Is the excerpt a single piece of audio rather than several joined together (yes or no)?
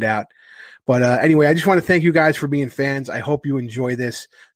yes